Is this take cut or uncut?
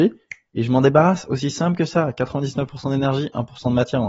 uncut